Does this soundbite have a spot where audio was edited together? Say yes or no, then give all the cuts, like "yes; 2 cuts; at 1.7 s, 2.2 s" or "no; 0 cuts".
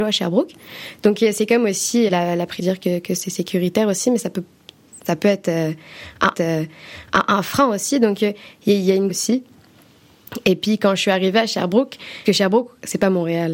yes; 6 cuts; at 2.1 s, 2.6 s, 5.0 s, 6.3 s, 9.1 s, 12.2 s